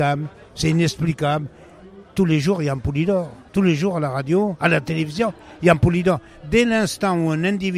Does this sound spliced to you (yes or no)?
yes